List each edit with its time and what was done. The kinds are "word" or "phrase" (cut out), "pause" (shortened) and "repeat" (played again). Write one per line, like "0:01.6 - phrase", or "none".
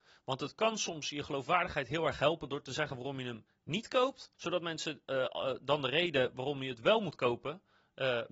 0:04.3 - pause